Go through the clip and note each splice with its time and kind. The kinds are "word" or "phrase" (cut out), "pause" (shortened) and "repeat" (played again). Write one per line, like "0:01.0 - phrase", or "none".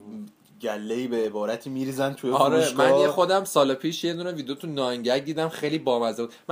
none